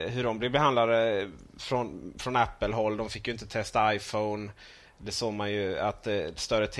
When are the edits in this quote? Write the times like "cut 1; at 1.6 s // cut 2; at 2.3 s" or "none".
none